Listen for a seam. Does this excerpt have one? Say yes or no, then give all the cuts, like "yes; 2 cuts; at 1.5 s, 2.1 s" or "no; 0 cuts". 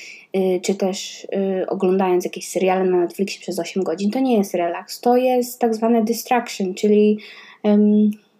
no; 0 cuts